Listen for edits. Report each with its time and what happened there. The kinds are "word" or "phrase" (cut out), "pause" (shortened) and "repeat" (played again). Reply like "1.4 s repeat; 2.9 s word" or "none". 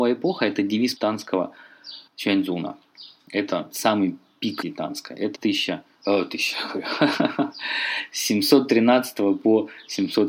1.0 s word; 2.1 s pause; 3.7 s word; 4.6 s phrase; 5.4 s word; 6.5 s word